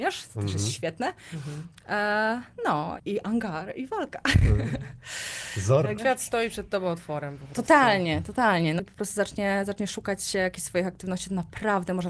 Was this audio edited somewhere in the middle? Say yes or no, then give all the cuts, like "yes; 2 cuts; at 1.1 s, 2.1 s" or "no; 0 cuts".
yes; 3 cuts; at 3.0 s, 6.0 s, 8.8 s